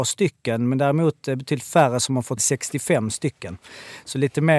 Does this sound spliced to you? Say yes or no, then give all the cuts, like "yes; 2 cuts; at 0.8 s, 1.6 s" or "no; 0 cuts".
yes; 1 cut; at 2.4 s